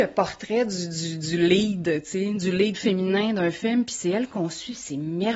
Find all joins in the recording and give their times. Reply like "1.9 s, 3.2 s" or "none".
none